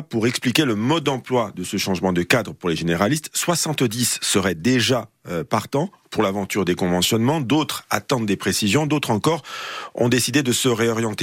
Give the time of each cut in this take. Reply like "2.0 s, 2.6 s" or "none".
none